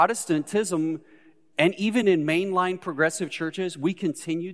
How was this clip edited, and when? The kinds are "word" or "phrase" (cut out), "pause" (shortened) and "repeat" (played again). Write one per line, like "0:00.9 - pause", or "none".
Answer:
none